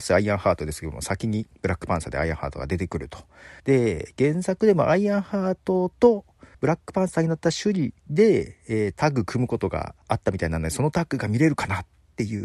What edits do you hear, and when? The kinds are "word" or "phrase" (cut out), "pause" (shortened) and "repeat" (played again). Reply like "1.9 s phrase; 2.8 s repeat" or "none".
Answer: 1.5 s pause; 3.6 s pause; 6.5 s pause; 10.0 s pause